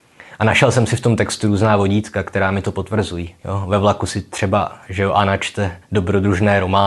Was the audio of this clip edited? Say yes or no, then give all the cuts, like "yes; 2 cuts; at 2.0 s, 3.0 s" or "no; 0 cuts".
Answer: yes; 2 cuts; at 3.4 s, 5.8 s